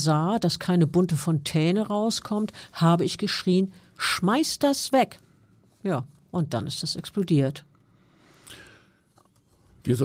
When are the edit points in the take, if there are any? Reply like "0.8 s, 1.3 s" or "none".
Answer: none